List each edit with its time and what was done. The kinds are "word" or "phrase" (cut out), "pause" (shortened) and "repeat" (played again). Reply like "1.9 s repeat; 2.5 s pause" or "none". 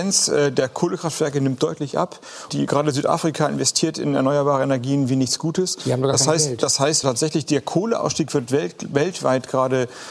2.5 s word; 7.0 s word